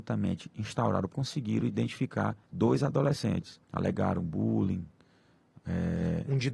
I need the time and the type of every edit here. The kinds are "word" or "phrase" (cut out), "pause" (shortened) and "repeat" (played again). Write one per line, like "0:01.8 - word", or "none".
0:01.1 - word
0:02.4 - pause
0:03.6 - pause